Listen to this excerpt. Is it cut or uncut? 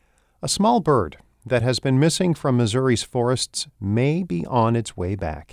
uncut